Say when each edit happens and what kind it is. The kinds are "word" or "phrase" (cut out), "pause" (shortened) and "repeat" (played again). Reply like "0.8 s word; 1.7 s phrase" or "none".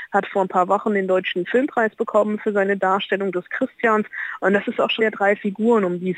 5.0 s word